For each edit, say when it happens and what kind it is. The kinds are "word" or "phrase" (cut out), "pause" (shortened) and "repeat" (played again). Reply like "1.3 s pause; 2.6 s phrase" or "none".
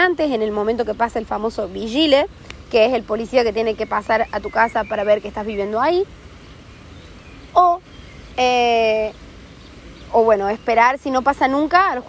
none